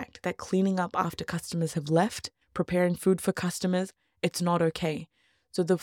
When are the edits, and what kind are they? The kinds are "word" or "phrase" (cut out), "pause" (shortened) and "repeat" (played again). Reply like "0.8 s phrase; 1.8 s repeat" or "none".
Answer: 2.4 s pause